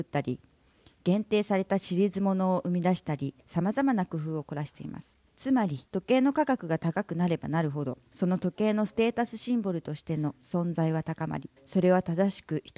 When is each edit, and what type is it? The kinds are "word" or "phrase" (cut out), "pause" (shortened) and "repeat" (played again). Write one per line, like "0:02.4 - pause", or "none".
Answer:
0:03.4 - pause
0:05.3 - pause
0:05.9 - pause
0:08.1 - pause
0:11.6 - pause